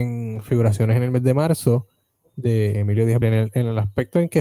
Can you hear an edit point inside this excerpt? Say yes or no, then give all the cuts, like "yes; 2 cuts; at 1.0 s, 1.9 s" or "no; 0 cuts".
yes; 1 cut; at 3.2 s